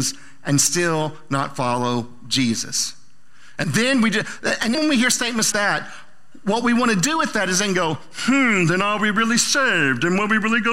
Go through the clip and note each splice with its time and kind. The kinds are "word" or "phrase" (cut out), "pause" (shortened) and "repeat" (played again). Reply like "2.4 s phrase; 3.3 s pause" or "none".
3.6 s word; 4.7 s word; 5.5 s word